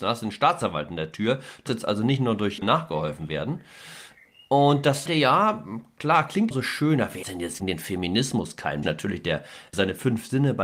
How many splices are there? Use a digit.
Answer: 8